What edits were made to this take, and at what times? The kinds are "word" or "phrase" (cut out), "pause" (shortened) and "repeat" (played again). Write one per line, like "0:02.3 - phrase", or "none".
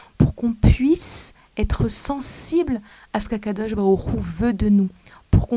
none